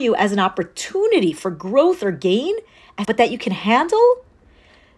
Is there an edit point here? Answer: yes; 1 cut; at 3.0 s

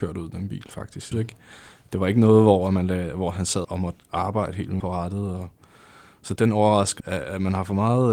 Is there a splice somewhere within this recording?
yes; 5 cuts; at 1.1 s, 3.6 s, 4.8 s, 6.4 s, 7.0 s

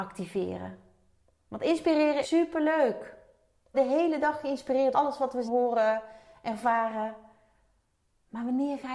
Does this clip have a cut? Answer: yes; 4 cuts; at 2.2 s, 3.7 s, 4.9 s, 5.5 s

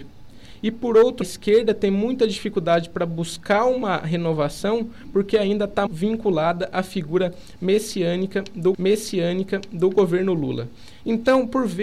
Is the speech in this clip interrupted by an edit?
yes; 3 cuts; at 1.2 s, 5.9 s, 8.7 s

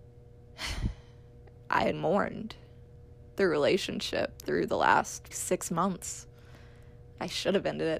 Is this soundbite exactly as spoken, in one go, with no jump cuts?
no; 3 cuts; at 1.9 s, 4.4 s, 5.3 s

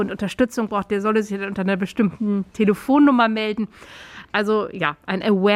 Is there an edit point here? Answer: no; 0 cuts

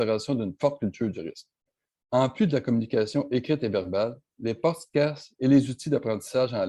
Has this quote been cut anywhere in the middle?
no; 0 cuts

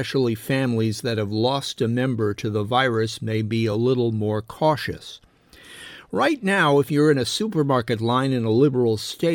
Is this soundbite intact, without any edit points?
yes; 0 cuts

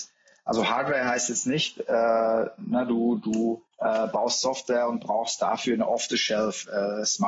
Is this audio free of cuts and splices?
no; 1 cut; at 3.7 s

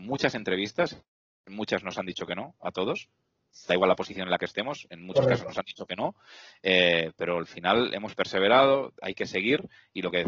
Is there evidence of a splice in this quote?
no; 0 cuts

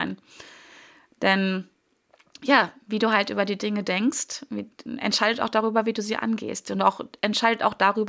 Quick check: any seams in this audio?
no; 0 cuts

